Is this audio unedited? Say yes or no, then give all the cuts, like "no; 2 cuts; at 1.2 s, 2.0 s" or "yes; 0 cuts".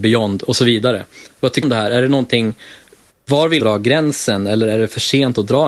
no; 2 cuts; at 1.6 s, 3.6 s